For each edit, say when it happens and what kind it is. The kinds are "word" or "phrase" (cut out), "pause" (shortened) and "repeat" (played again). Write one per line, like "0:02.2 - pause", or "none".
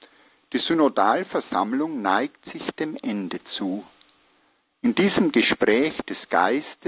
none